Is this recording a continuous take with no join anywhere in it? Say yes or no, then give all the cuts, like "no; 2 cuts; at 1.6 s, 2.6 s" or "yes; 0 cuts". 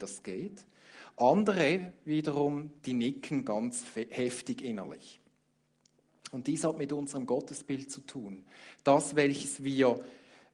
yes; 0 cuts